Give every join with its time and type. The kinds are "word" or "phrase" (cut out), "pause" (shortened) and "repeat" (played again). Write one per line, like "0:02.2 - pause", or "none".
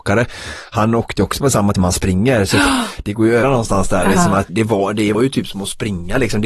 0:01.7 - word
0:03.4 - word
0:04.5 - word
0:05.1 - word